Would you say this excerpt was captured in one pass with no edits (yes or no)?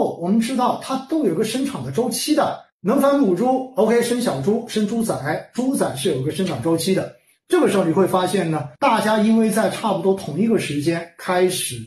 no